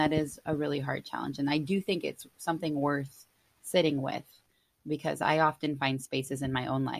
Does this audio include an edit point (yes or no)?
no